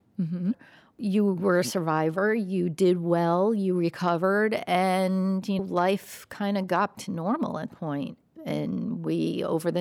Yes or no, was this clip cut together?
yes